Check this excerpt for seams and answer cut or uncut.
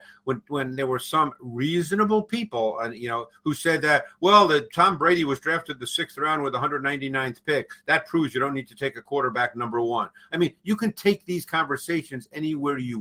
uncut